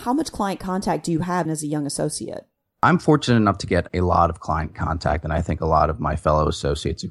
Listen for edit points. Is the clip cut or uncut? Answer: cut